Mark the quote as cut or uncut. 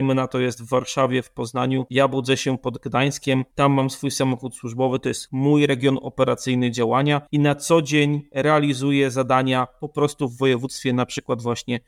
cut